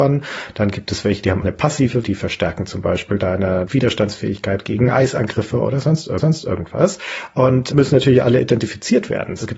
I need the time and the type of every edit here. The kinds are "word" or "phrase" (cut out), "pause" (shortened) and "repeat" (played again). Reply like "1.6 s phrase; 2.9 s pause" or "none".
1.4 s word; 2.0 s word; 6.2 s repeat